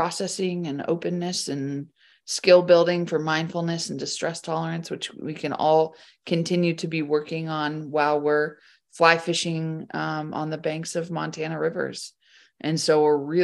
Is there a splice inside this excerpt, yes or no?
no